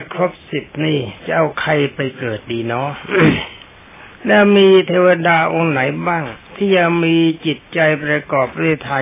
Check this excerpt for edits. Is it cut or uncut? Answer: cut